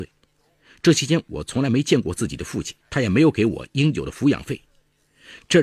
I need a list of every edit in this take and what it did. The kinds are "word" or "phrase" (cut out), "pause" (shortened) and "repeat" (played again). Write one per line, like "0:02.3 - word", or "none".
0:02.8 - pause